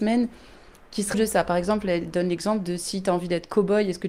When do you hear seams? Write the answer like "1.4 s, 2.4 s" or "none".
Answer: 1.1 s